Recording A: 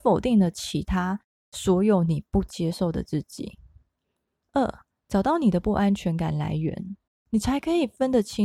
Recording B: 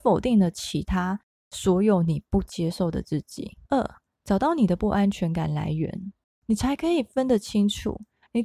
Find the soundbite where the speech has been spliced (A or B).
B